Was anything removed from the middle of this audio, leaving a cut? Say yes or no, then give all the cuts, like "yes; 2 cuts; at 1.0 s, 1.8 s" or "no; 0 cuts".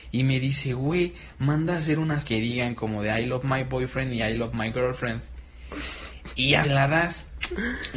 yes; 2 cuts; at 2.2 s, 6.6 s